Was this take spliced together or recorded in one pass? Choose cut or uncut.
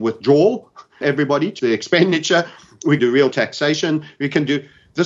cut